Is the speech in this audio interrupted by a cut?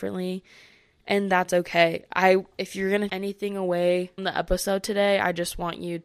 yes; 2 cuts; at 3.1 s, 4.2 s

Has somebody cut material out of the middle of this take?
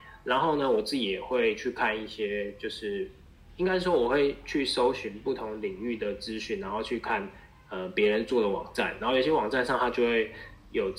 no; 0 cuts

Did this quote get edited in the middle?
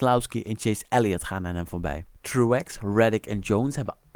no; 0 cuts

